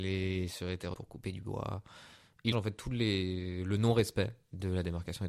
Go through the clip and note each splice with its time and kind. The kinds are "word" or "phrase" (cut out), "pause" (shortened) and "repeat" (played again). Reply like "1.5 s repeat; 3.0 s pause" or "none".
0.9 s word; 2.5 s word

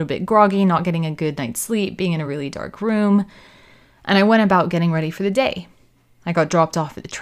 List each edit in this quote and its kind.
none

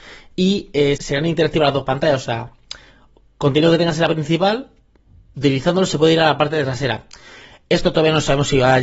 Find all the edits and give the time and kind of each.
1.0 s word; 4.1 s word

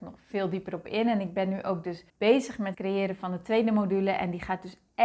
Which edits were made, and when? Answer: 2.1 s pause; 2.7 s word

